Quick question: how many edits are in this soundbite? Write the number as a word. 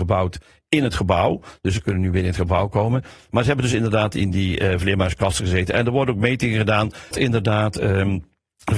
one